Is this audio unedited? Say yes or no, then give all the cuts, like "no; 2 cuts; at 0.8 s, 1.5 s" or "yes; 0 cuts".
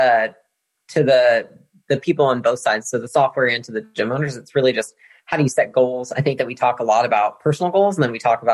yes; 0 cuts